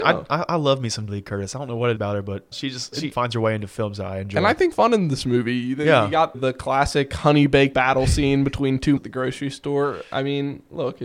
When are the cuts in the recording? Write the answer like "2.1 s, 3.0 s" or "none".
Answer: 1.1 s, 2.0 s, 2.5 s, 3.1 s, 4.7 s, 6.3 s, 7.7 s, 9.0 s